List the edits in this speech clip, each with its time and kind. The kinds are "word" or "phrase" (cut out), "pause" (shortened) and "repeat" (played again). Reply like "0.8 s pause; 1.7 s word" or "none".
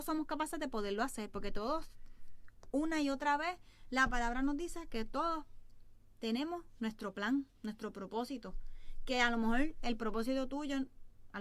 none